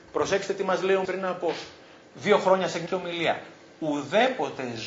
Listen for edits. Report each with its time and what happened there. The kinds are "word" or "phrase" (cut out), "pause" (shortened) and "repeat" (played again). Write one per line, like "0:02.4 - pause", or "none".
0:01.0 - word
0:02.9 - word